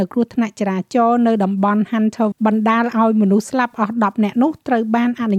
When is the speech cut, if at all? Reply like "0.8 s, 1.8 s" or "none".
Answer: 2.3 s